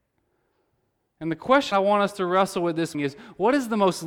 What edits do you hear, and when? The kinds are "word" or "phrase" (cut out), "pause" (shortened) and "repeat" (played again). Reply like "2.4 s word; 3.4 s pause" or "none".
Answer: 1.7 s word; 2.9 s word

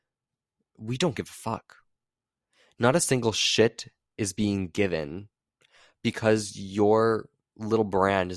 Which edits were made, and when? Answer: none

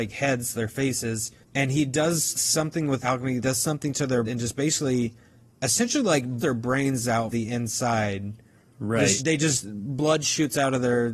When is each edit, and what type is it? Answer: 2.3 s word; 3.0 s word; 3.4 s word; 4.3 s word; 6.4 s word; 7.3 s word; 9.2 s word

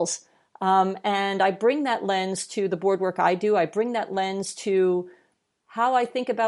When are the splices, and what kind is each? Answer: none

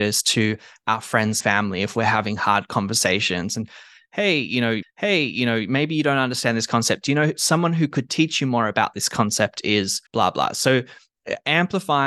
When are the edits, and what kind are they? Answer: 1.4 s word; 4.8 s repeat; 10.1 s pause

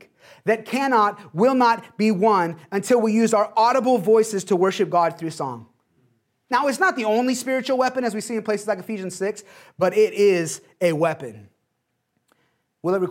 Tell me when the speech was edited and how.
none

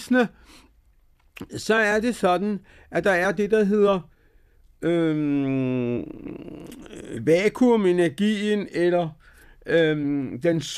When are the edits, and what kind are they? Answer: none

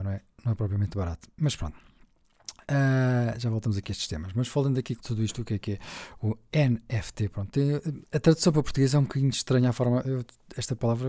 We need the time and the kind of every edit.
5.0 s phrase; 8.0 s pause

